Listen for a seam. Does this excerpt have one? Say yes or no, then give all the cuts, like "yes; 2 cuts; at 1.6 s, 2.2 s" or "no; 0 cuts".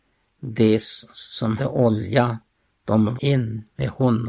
yes; 2 cuts; at 1.6 s, 3.2 s